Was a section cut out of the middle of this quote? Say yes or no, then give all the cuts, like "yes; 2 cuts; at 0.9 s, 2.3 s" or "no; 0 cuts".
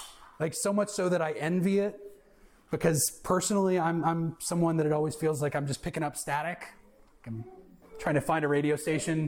no; 0 cuts